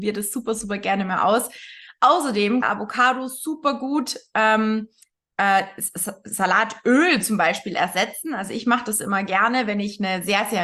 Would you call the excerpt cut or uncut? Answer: cut